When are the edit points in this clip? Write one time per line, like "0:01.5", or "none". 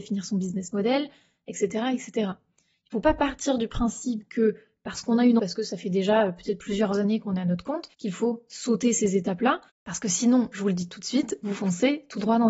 0:05.4
0:07.9